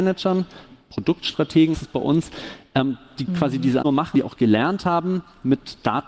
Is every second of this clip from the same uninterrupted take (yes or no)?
no